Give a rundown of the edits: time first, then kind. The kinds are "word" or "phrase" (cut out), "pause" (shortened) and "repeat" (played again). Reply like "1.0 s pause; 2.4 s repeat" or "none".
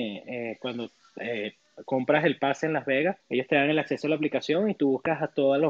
3.2 s pause

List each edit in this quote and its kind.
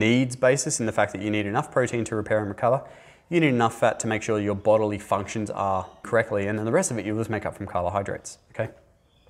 6.0 s word

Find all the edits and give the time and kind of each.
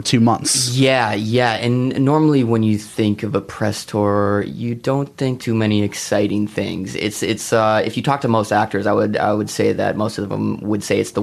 5.4 s word

